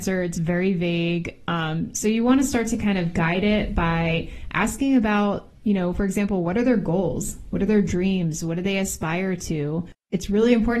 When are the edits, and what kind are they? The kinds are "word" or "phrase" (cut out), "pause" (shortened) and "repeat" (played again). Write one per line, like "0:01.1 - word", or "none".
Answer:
none